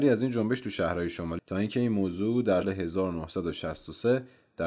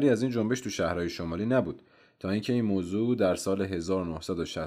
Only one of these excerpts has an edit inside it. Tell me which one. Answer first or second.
first